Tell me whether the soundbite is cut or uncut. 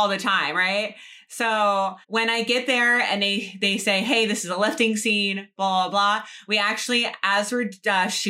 cut